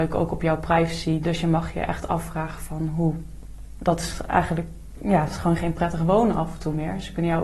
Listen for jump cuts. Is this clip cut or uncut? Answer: uncut